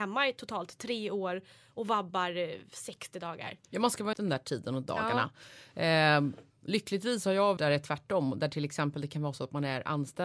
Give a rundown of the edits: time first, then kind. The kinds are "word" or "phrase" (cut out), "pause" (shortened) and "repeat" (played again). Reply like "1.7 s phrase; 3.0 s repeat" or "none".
3.6 s pause; 4.1 s phrase; 7.6 s word